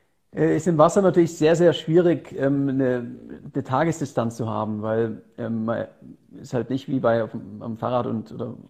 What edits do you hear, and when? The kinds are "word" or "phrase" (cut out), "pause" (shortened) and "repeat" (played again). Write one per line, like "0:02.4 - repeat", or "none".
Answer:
none